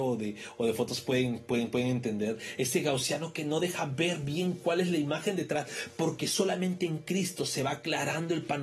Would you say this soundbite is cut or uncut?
uncut